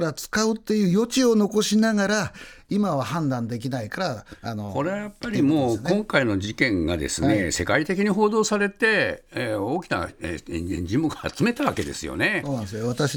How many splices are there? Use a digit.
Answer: 1